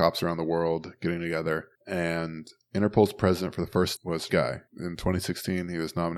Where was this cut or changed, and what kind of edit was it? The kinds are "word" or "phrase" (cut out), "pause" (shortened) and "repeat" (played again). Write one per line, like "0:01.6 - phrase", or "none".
0:01.8 - pause
0:04.0 - word
0:04.3 - word
0:04.7 - pause